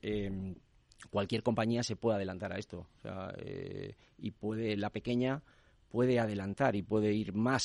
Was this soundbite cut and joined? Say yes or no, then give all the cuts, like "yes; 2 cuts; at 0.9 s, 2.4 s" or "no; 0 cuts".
no; 0 cuts